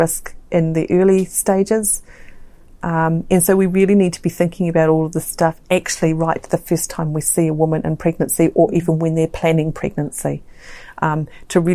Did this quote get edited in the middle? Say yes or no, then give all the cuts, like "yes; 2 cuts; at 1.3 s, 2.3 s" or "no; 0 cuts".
no; 0 cuts